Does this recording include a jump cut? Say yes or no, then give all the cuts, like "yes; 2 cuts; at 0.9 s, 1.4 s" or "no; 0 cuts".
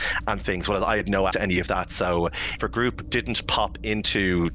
yes; 2 cuts; at 1.3 s, 2.6 s